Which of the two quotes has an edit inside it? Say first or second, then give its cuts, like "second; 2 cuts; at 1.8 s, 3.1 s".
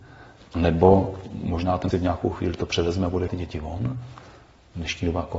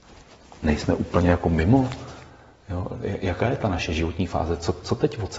first; 2 cuts; at 1.9 s, 3.3 s